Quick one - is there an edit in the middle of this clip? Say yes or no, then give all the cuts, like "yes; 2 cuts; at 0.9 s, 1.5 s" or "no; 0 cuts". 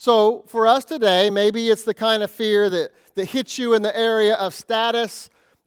no; 0 cuts